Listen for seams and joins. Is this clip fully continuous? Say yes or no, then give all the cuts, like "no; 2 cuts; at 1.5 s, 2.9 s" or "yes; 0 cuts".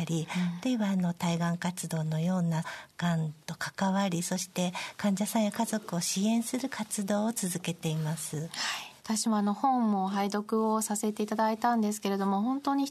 no; 1 cut; at 9.0 s